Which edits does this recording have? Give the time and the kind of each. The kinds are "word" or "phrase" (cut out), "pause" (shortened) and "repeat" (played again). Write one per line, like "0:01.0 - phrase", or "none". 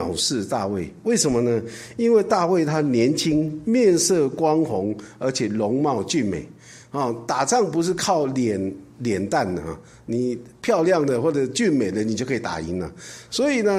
none